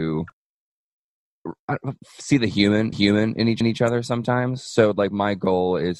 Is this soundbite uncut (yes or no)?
no